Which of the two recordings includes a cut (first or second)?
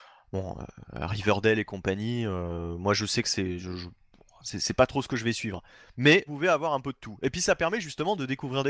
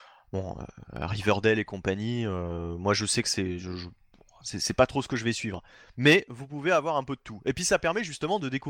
first